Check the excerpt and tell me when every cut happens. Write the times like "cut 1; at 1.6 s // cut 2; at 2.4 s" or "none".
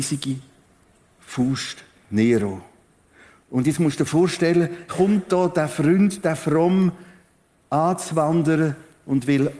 cut 1; at 4.9 s